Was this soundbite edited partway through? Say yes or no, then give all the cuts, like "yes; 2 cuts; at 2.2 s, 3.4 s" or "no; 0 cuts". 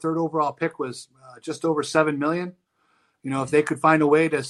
no; 0 cuts